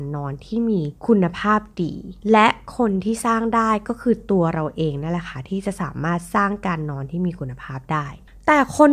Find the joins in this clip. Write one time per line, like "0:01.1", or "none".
0:01.0
0:02.2

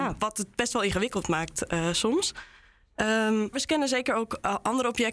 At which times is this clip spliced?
0:03.5

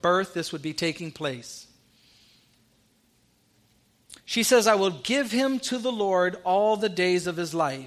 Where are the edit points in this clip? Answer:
0:04.2

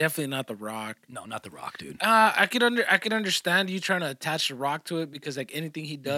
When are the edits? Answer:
none

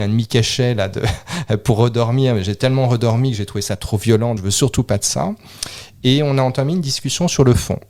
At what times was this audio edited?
0:04.4

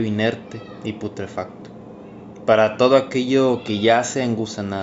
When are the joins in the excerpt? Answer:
none

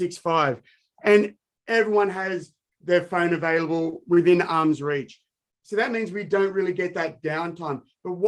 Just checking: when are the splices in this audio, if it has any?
none

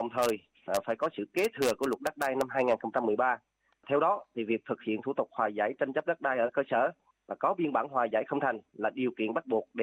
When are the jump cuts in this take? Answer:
none

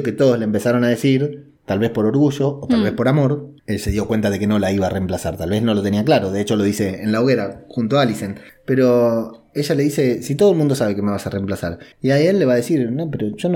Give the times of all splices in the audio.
0:01.6
0:03.6
0:08.5
0:11.9

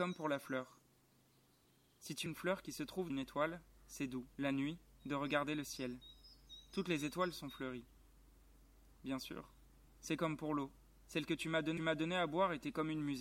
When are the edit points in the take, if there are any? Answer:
0:02.3
0:03.1
0:04.3
0:09.9
0:10.9
0:11.8

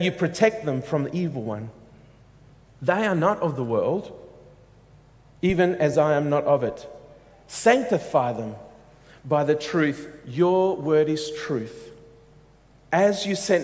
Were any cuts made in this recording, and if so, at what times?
none

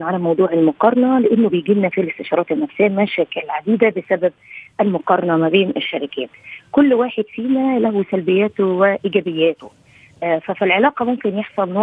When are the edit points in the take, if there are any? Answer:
none

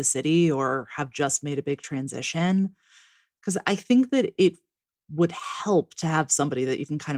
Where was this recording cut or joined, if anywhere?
none

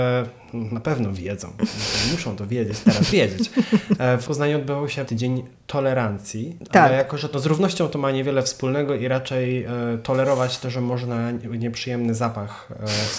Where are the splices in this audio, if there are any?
0:03.1
0:04.2
0:05.1
0:07.3
0:10.6

